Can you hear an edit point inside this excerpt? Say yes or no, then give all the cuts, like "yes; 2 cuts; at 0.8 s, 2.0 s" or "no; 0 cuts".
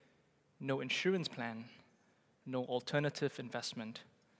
no; 0 cuts